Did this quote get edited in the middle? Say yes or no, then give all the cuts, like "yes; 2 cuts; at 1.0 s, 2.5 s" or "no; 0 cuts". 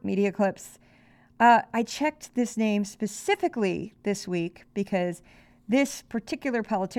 no; 0 cuts